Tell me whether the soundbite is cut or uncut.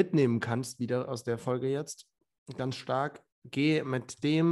cut